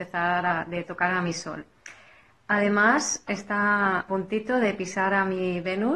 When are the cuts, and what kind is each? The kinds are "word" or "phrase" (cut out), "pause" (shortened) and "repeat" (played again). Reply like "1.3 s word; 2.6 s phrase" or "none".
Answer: 3.3 s word; 4.1 s word

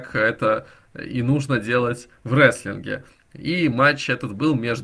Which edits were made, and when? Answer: none

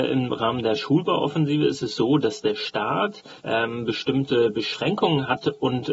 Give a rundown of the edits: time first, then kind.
3.4 s pause

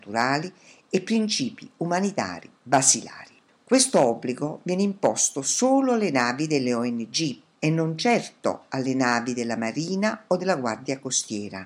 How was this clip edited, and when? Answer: 3.5 s pause

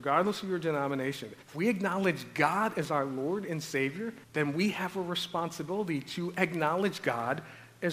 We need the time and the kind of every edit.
1.4 s pause; 4.2 s pause

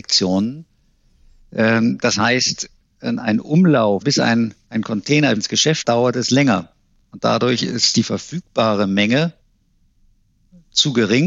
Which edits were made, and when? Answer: 4.0 s word; 5.4 s word; 5.8 s word

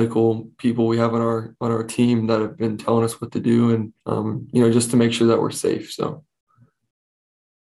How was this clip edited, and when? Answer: 4.0 s pause

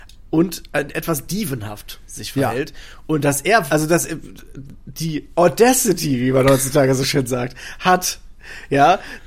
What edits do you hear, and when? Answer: 3.7 s word

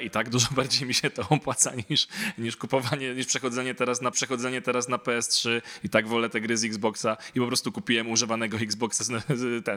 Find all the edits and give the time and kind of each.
4.1 s repeat

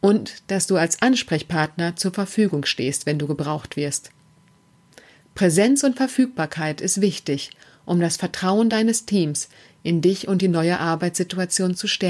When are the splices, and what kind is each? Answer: none

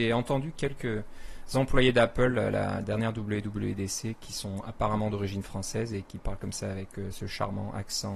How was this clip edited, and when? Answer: none

